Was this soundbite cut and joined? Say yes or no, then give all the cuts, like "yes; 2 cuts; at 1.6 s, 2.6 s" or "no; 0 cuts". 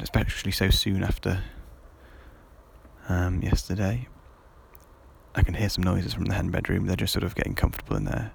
no; 0 cuts